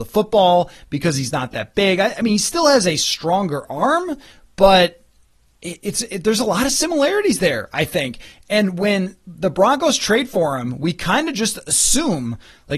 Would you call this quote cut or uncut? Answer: uncut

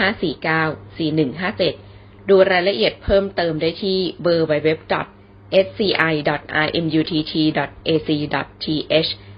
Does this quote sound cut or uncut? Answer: uncut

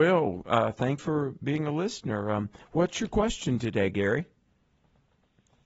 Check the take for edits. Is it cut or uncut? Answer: cut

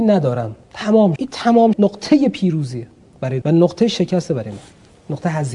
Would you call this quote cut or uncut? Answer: cut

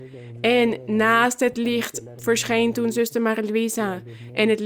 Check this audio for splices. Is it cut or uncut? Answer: uncut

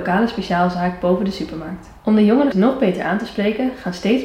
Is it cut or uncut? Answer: cut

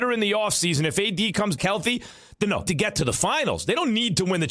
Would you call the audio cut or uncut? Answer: cut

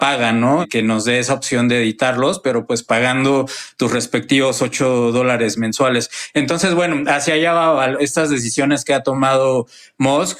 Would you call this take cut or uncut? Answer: uncut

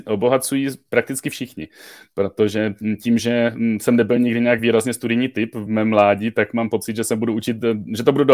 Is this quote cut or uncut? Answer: uncut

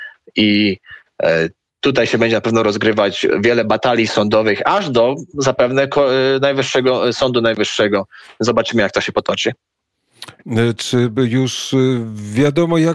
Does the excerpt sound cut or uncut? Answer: uncut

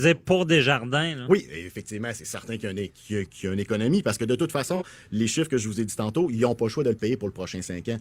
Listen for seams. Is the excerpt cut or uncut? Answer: uncut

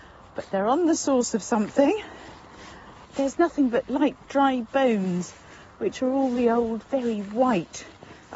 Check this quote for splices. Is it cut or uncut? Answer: uncut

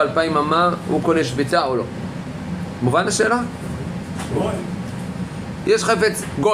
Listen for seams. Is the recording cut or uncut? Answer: uncut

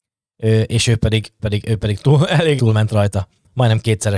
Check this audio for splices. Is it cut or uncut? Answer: cut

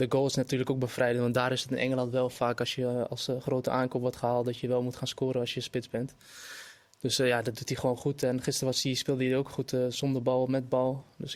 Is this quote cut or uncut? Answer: uncut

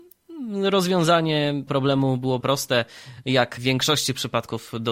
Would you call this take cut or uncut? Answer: cut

